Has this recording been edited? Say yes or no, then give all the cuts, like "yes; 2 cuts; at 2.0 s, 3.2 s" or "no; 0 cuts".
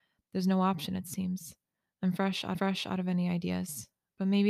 yes; 1 cut; at 2.5 s